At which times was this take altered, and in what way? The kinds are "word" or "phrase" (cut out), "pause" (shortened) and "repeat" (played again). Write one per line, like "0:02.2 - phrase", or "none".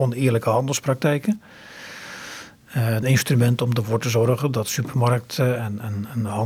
0:03.0 - phrase